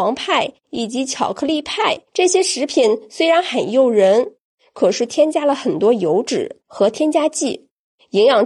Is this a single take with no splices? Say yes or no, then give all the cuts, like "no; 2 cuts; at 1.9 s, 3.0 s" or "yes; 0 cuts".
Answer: no; 1 cut; at 2.1 s